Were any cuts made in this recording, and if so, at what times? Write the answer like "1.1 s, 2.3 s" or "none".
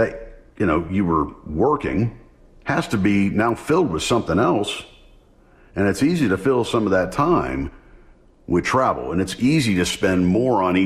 none